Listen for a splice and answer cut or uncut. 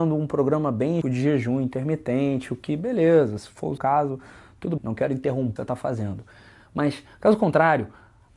cut